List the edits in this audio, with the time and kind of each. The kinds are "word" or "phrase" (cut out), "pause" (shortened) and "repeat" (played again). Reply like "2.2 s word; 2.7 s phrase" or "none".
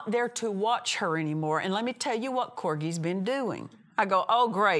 none